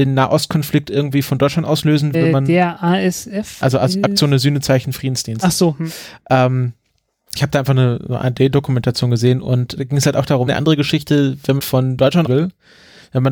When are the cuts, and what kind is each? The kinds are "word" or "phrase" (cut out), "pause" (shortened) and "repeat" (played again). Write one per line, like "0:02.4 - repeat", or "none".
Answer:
0:02.1 - phrase
0:07.4 - word
0:09.8 - word
0:10.5 - phrase
0:11.6 - phrase
0:12.3 - word